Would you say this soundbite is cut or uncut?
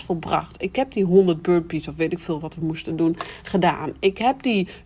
uncut